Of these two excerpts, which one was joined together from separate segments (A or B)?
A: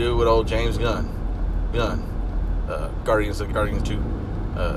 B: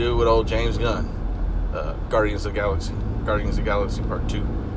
A